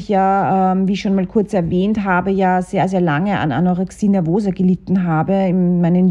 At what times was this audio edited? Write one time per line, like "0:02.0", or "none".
none